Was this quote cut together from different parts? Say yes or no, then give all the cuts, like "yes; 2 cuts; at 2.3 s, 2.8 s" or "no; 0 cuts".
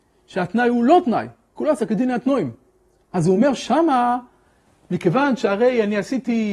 no; 0 cuts